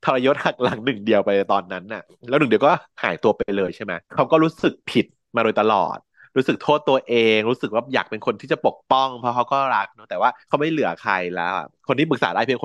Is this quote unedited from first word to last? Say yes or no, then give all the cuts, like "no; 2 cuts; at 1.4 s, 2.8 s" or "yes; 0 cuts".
no; 2 cuts; at 4.0 s, 10.4 s